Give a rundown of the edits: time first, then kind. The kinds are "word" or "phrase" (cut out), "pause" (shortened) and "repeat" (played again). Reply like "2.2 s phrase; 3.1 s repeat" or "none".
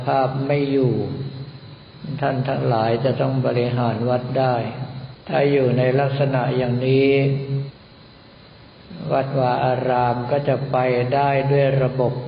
5.2 s pause